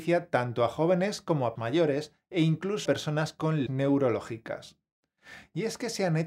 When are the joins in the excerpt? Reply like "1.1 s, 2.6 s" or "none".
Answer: 1.6 s, 2.9 s, 3.7 s